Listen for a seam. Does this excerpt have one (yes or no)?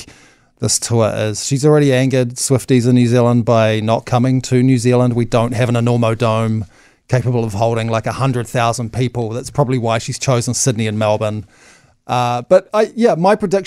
no